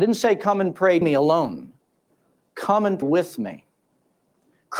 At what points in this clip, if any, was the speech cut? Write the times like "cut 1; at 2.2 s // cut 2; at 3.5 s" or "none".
cut 1; at 1.0 s // cut 2; at 2.1 s // cut 3; at 3.0 s

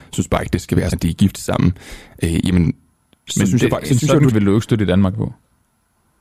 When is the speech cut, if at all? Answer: cut 1; at 0.9 s // cut 2; at 4.3 s // cut 3; at 5.1 s

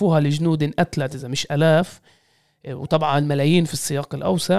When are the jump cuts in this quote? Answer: none

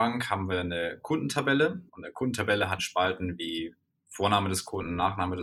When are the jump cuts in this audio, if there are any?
cut 1; at 1.9 s // cut 2; at 2.8 s

